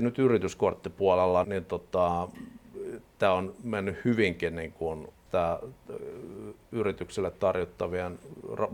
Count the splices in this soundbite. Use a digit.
3